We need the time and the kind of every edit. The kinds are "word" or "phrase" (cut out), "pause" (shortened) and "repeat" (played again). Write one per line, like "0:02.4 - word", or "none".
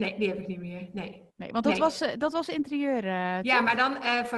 0:01.3 - pause